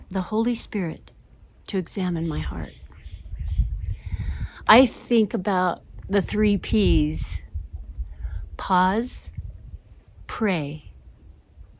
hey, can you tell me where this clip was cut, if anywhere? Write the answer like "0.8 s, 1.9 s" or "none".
none